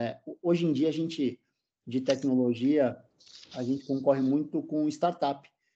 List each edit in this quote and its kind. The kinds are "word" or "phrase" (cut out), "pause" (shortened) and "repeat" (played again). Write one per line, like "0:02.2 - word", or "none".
none